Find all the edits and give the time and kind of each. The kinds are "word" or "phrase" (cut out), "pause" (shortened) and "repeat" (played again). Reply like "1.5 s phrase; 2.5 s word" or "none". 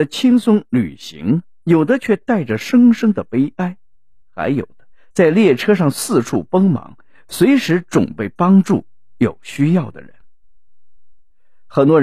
none